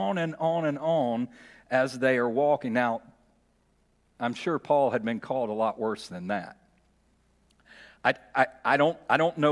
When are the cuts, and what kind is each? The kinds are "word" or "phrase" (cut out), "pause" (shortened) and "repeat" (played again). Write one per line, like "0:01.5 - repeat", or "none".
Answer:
none